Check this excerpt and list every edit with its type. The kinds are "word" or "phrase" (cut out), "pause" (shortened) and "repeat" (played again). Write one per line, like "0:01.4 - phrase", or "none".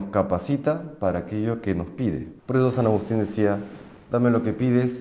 0:02.4 - pause